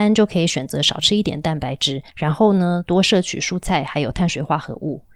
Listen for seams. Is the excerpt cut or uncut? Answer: cut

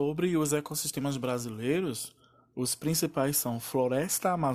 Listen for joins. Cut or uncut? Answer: uncut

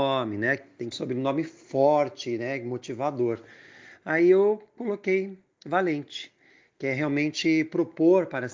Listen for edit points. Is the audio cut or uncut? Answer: cut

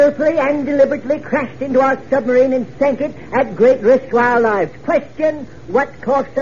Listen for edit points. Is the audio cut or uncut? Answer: uncut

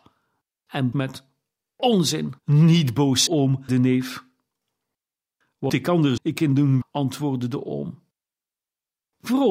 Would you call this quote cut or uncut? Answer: cut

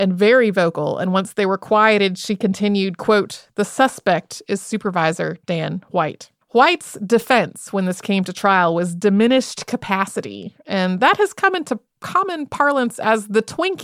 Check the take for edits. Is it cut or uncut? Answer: cut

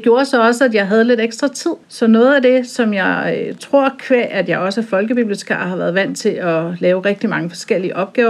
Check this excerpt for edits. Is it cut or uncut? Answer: cut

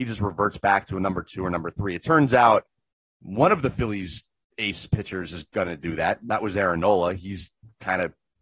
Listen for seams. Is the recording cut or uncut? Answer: uncut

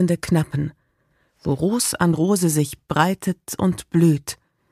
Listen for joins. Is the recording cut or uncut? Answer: uncut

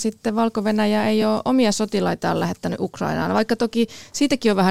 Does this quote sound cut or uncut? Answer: uncut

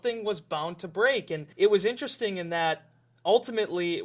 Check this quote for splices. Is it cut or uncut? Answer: cut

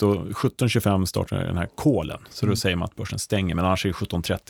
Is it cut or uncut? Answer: uncut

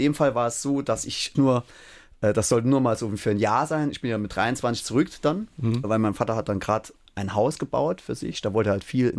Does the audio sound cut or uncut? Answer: cut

